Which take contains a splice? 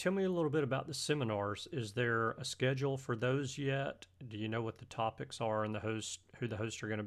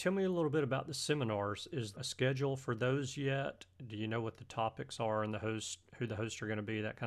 second; 1 cut; at 1.9 s

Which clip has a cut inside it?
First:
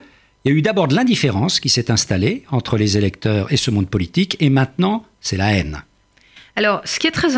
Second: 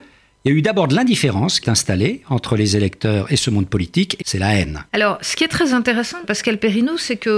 second; 4 cuts; at 1.6 s, 4.2 s, 4.9 s, 6.2 s

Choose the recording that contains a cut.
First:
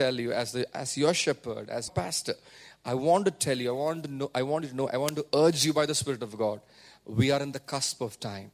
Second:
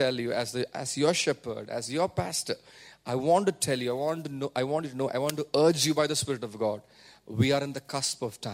first; 1 cut; at 1.9 s

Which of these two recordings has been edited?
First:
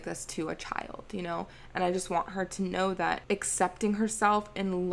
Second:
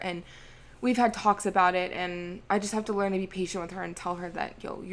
second; 1 cut; at 2.5 s

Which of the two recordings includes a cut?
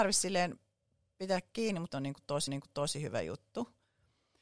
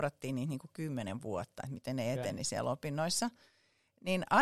first; 2 cuts; at 1.9 s, 2.5 s

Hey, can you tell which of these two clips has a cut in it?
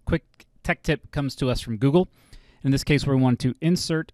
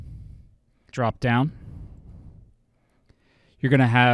second; 1 cut; at 0.9 s

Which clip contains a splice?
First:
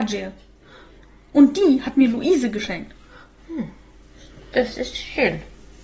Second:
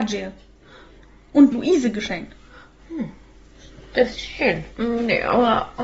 second; 3 cuts; at 1.5 s, 4.1 s, 4.7 s

